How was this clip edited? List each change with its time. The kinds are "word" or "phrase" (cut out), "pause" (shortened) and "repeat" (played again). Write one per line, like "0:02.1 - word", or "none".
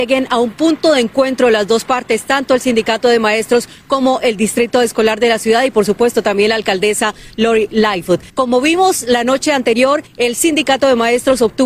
0:08.3 - pause
0:10.1 - pause